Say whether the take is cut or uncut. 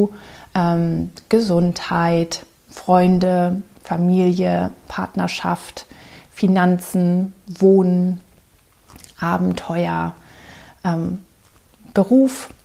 uncut